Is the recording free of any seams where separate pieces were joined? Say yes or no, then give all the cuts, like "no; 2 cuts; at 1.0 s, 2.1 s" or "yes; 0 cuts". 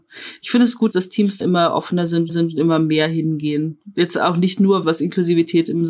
no; 4 cuts; at 0.9 s, 1.4 s, 2.3 s, 4.8 s